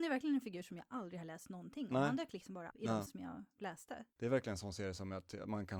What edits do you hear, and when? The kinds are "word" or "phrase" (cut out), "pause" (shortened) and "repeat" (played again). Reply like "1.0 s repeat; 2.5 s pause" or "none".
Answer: 2.7 s phrase; 3.1 s word; 4.1 s pause

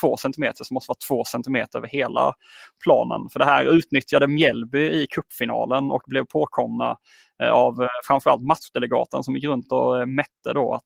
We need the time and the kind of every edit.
none

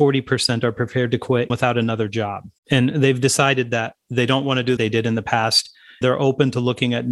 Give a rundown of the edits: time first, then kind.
1.5 s word; 2.6 s pause; 4.8 s phrase; 6.0 s word

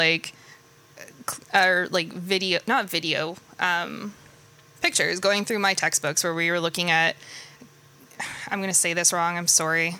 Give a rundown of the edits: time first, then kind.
none

